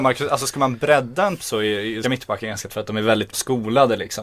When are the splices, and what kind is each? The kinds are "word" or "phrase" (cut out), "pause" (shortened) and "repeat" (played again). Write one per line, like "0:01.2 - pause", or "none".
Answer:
0:01.4 - word
0:02.0 - word
0:02.7 - word
0:03.3 - word